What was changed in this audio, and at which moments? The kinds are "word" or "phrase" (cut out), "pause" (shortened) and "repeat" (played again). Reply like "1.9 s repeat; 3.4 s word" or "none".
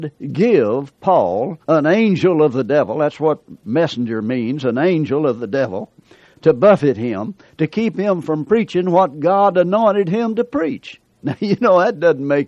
1.6 s pause

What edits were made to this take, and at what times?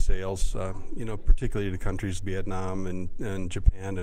2.2 s word

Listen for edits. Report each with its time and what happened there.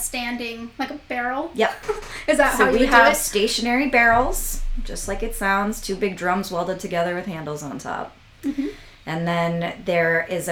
none

